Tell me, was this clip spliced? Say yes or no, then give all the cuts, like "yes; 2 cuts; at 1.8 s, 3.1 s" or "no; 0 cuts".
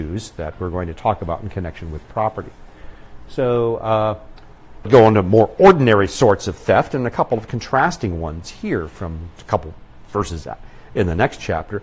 yes; 2 cuts; at 4.8 s, 9.4 s